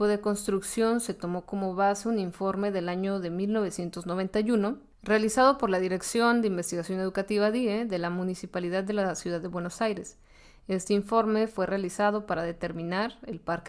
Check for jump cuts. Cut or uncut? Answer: uncut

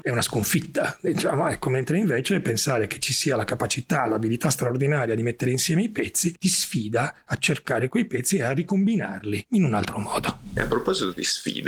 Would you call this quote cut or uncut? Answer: uncut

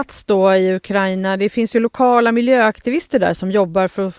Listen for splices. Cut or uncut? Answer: uncut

